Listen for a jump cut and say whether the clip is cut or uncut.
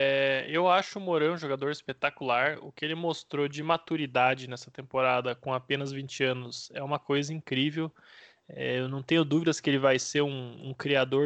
uncut